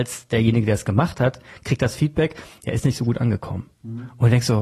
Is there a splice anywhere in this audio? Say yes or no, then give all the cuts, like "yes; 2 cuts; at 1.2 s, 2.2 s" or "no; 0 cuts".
no; 0 cuts